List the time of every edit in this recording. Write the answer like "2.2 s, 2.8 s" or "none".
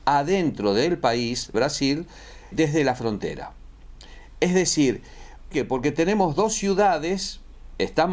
1.5 s, 2.5 s, 5.5 s